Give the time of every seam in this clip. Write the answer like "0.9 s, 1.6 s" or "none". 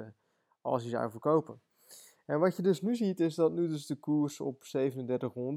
none